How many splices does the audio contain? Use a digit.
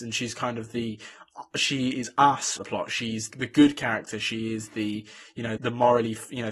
3